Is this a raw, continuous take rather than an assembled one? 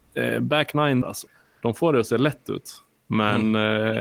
no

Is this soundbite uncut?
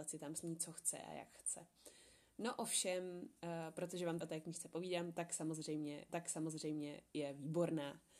no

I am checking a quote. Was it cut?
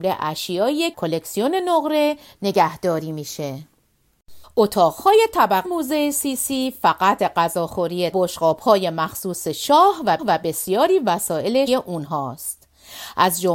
yes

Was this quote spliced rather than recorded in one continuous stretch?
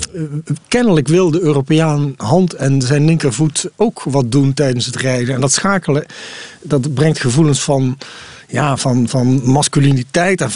yes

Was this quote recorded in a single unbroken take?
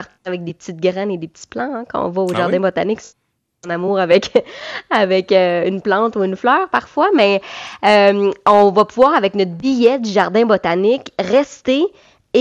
yes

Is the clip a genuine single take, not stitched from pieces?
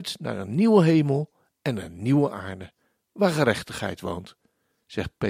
yes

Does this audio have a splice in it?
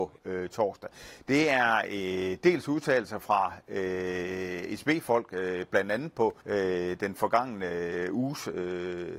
yes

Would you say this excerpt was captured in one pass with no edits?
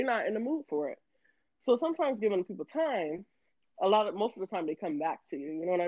yes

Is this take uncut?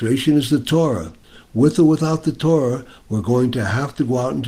yes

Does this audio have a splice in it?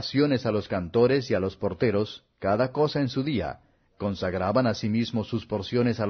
no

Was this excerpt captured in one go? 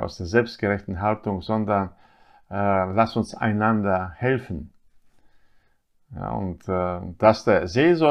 yes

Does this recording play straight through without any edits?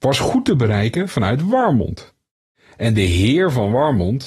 yes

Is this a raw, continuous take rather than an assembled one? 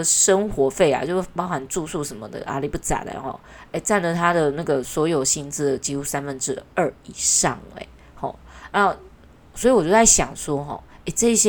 yes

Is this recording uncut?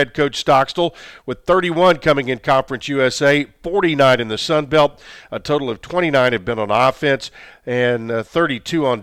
yes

